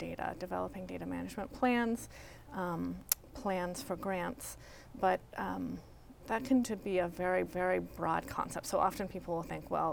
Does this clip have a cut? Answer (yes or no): yes